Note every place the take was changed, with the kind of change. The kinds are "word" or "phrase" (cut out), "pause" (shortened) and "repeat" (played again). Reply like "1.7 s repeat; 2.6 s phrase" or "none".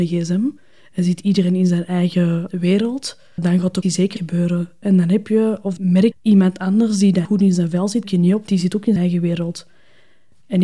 3.4 s word; 3.8 s word; 4.2 s word; 5.8 s word; 6.1 s word; 7.2 s word; 8.0 s word; 8.5 s word; 9.0 s word